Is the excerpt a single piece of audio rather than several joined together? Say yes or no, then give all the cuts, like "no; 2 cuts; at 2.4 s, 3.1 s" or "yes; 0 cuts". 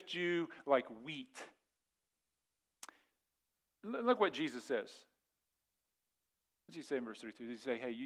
yes; 0 cuts